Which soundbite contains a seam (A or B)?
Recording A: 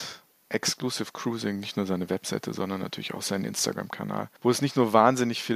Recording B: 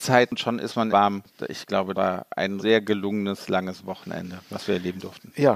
B